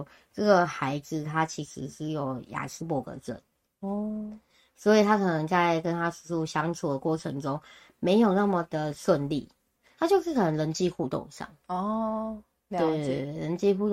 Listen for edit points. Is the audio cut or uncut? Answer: uncut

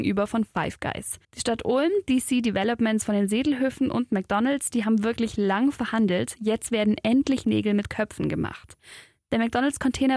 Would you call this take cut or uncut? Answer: cut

